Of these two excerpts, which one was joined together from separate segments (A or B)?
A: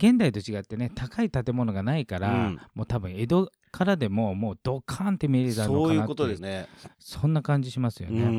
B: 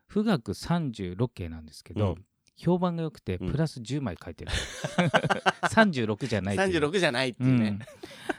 A